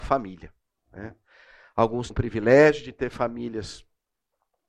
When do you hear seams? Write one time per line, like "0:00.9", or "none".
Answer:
0:02.1